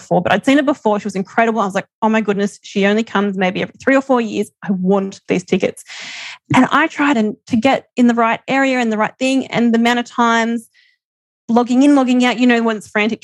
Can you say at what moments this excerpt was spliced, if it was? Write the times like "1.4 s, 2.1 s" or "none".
7.1 s